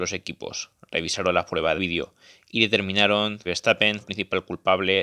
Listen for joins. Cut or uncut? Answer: cut